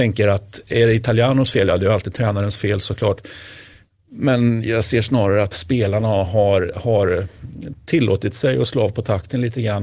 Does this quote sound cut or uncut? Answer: uncut